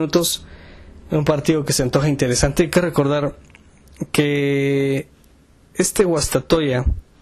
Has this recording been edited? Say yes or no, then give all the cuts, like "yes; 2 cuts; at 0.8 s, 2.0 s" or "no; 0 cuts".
no; 0 cuts